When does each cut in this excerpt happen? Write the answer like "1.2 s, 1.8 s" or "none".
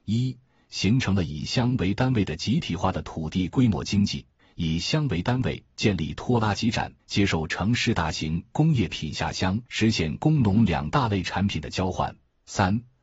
4.4 s, 7.0 s, 9.7 s